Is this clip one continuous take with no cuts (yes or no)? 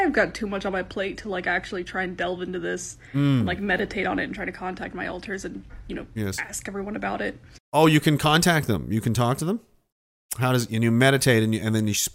yes